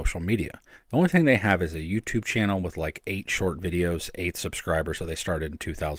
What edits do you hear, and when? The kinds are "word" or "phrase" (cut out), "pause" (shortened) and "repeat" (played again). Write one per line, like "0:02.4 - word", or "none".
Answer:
none